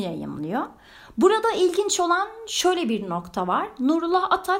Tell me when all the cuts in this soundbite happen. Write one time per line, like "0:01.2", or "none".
none